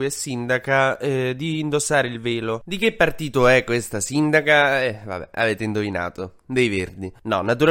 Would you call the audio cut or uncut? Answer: uncut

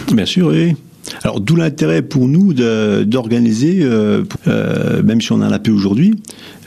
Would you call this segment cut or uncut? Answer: cut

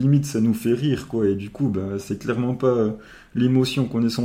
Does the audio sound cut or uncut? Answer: uncut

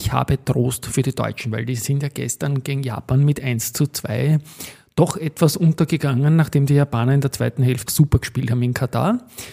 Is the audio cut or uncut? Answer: cut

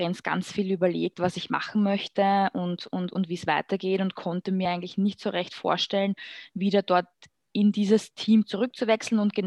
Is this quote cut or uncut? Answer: uncut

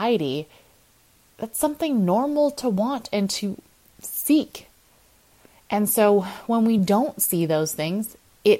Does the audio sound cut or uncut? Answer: uncut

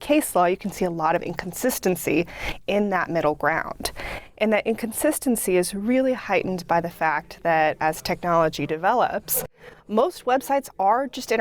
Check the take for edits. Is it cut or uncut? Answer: uncut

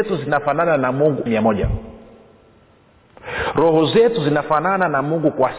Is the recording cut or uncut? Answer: cut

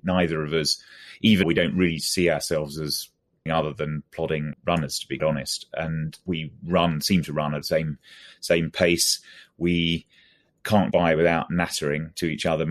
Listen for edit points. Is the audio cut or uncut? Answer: cut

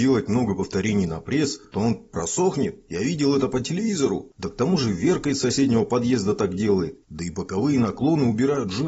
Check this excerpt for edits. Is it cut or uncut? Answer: uncut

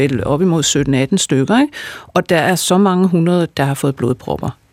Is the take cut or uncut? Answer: uncut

